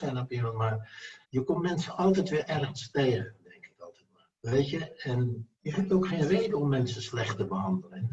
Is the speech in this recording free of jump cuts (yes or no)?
no